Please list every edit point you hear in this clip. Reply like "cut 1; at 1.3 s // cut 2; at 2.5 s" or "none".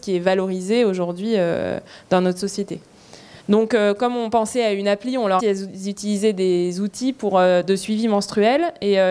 cut 1; at 3.4 s // cut 2; at 5.4 s